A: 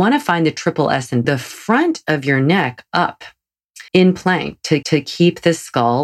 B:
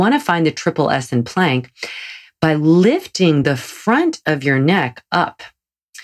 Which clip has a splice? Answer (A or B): A